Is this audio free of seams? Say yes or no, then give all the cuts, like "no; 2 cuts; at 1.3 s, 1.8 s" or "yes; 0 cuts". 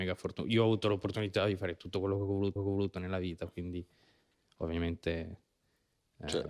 no; 1 cut; at 2.6 s